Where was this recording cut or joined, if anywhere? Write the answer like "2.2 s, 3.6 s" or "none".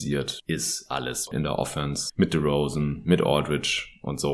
none